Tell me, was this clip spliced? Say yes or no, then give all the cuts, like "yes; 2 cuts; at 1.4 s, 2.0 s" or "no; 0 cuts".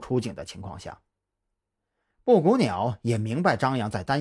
no; 0 cuts